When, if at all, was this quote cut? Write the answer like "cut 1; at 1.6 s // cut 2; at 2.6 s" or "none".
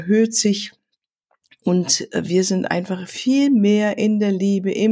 none